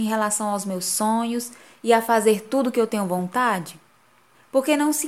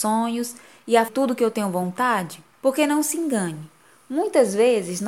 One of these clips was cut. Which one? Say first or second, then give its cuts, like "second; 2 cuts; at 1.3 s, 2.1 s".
second; 2 cuts; at 1.1 s, 2.5 s